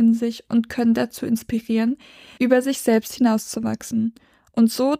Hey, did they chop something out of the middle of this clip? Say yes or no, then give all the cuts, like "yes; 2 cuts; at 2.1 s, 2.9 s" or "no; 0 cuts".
no; 0 cuts